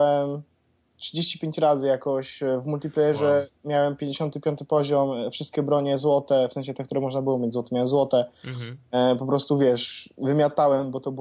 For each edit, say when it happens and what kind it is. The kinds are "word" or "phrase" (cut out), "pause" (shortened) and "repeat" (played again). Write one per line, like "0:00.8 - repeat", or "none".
none